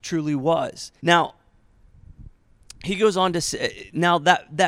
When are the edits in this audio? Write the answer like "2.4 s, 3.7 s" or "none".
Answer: 1.0 s